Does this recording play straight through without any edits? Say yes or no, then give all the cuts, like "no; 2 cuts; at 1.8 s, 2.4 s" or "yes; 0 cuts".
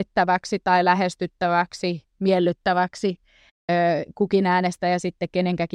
yes; 0 cuts